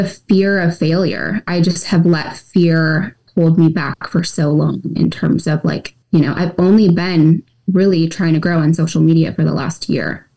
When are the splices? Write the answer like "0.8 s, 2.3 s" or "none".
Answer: 3.3 s, 6.0 s